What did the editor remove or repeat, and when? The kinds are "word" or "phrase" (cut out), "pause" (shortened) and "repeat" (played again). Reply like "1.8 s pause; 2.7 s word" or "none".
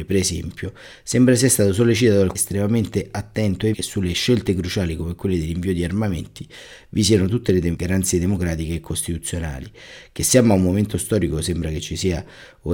2.3 s word; 3.7 s word